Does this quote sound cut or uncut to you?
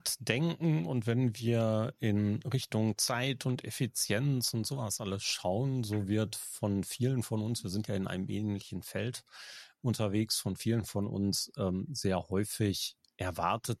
uncut